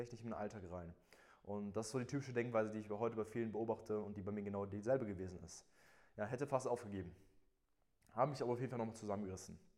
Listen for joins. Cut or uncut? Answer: uncut